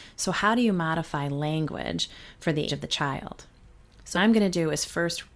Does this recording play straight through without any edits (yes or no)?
no